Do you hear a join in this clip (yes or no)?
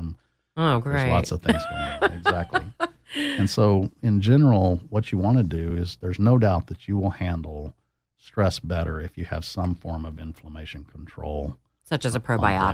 no